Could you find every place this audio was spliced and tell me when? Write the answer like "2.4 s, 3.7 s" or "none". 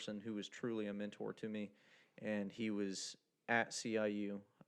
none